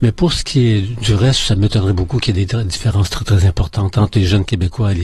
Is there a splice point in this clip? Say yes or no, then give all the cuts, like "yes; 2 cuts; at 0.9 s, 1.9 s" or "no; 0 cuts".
no; 0 cuts